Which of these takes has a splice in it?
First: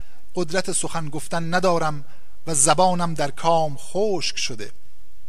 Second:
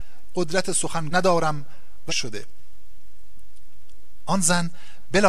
second; 2 cuts; at 1.1 s, 2.1 s

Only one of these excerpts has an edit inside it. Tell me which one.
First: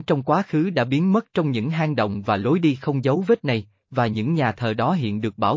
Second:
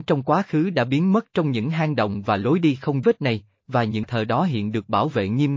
second; 2 cuts; at 3.0 s, 4.0 s

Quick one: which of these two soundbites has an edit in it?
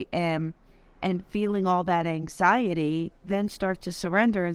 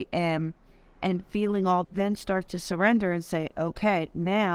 second; 1 cut; at 1.8 s

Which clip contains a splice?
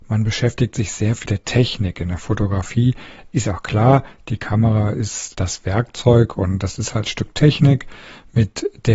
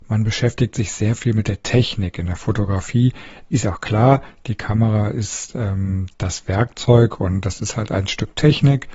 first; 3 cuts; at 1.3 s, 5.3 s, 7.1 s

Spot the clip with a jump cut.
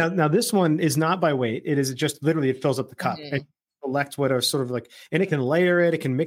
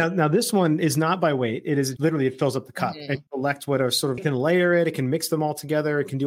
second; 3 cuts; at 2.0 s, 3.3 s, 4.2 s

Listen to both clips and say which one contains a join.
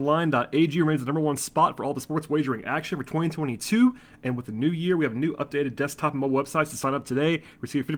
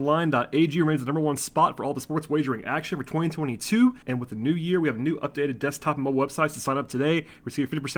second; 1 cut; at 4.0 s

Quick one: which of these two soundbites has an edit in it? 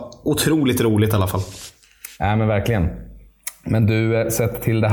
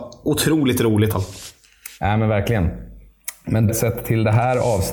second; 2 cuts; at 1.1 s, 3.7 s

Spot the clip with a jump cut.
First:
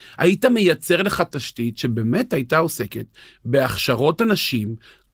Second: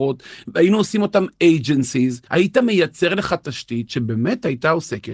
second; 1 cut; at 2.3 s

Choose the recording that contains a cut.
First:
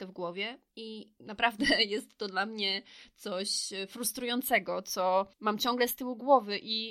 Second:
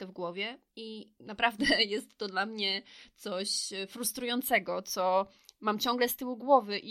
first; 1 cut; at 5.3 s

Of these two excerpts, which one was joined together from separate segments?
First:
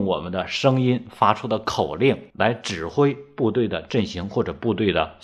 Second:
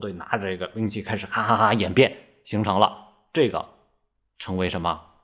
first; 1 cut; at 2.3 s

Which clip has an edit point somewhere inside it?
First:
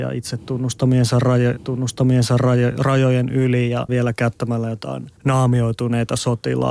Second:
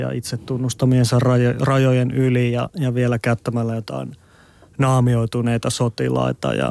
first; 3 cuts; at 1.6 s, 3.9 s, 5.2 s

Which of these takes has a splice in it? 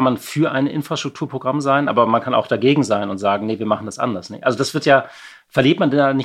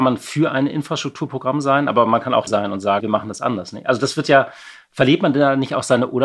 second; 2 cuts; at 2.5 s, 3.0 s

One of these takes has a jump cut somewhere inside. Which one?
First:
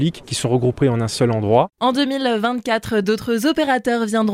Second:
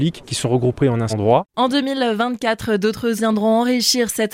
second; 2 cuts; at 1.1 s, 3.2 s

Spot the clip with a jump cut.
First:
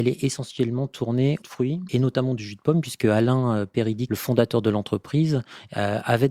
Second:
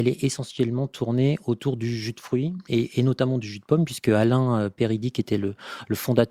first; 3 cuts; at 1.4 s, 1.9 s, 4.1 s

